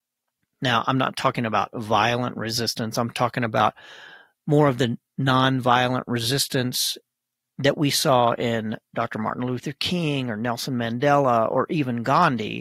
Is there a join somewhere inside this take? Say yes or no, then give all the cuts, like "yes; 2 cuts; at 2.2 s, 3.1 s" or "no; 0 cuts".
no; 0 cuts